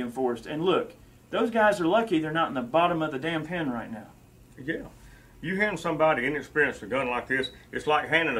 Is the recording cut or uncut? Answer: uncut